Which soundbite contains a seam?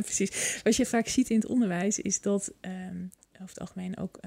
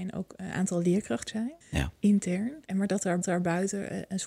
second; 4 cuts; at 1.3 s, 1.6 s, 2.6 s, 3.2 s

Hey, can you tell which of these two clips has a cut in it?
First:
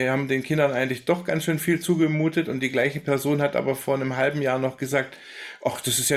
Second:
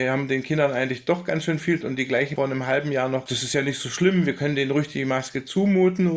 second; 3 cuts; at 1.8 s, 2.4 s, 3.3 s

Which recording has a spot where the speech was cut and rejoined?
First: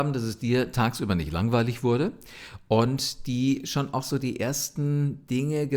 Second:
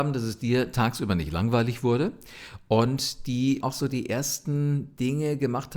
second; 1 cut; at 3.6 s

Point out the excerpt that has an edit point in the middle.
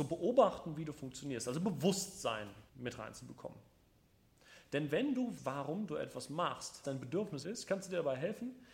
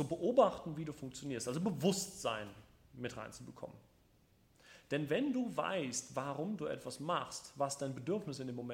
first; 4 cuts; at 2.7 s, 5.4 s, 6.8 s, 7.4 s

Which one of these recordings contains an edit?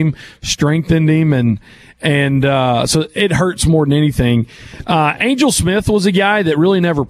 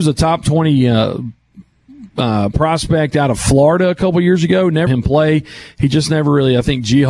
second; 2 cuts; at 2.1 s, 4.9 s

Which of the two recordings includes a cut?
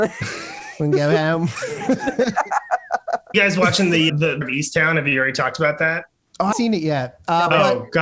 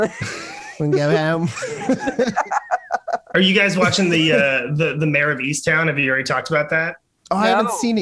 first; 4 cuts; at 3.3 s, 4.1 s, 4.4 s, 6.5 s

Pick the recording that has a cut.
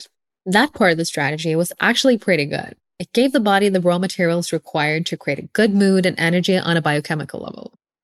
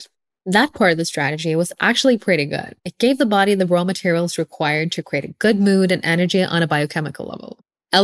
second; 1 cut; at 2.8 s

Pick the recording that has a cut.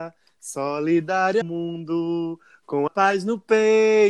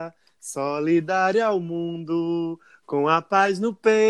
first; 2 cuts; at 1.4 s, 2.9 s

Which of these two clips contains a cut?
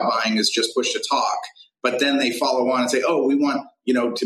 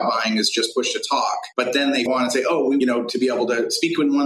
second; 3 cuts; at 1.5 s, 2.1 s, 2.8 s

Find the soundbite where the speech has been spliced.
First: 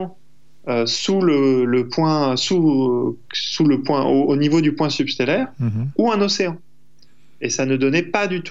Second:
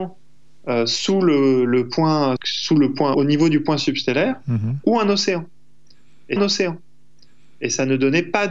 second; 3 cuts; at 2.4 s, 3.1 s, 6.4 s

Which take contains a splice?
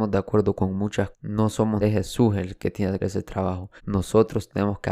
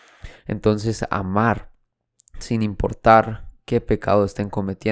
first; 4 cuts; at 1.1 s, 1.8 s, 3.0 s, 3.8 s

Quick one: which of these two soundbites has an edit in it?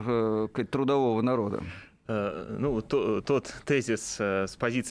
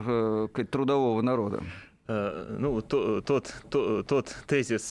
second; 1 cut; at 3.6 s

